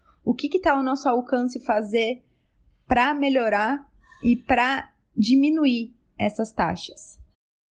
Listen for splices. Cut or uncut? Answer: uncut